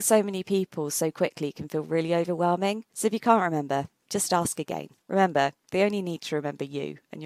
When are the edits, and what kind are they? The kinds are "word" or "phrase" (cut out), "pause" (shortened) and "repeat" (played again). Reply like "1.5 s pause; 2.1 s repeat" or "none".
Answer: 2.9 s pause; 5.0 s pause